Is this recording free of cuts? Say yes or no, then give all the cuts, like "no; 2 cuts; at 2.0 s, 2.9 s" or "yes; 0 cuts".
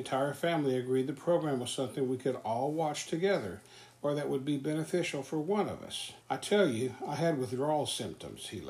no; 1 cut; at 6.2 s